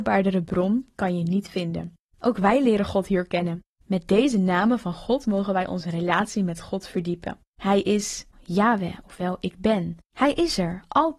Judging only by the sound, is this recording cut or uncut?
cut